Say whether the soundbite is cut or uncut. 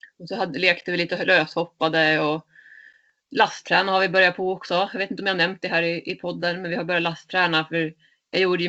uncut